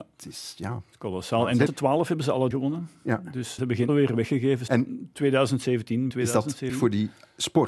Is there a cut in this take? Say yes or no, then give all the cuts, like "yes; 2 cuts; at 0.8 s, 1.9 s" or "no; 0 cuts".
yes; 7 cuts; at 1.7 s, 2.5 s, 3.6 s, 3.9 s, 4.7 s, 6.1 s, 6.7 s